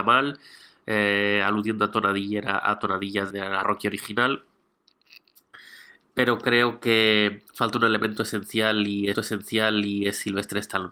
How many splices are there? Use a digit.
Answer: 4